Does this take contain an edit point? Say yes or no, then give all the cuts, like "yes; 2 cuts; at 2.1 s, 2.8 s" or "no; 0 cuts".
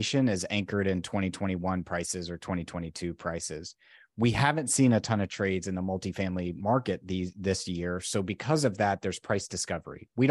no; 0 cuts